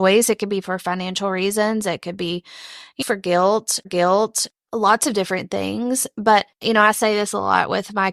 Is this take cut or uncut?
cut